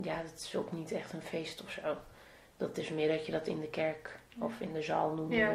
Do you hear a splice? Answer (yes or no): no